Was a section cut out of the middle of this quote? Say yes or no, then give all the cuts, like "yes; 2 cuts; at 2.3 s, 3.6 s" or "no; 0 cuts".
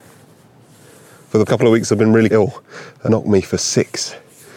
yes; 3 cuts; at 1.5 s, 2.3 s, 3.1 s